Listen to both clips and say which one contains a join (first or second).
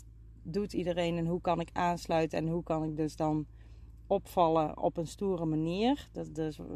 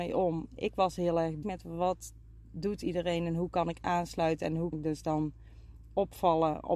second